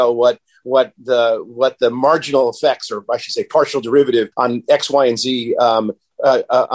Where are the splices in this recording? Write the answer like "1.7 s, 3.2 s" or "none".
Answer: 4.3 s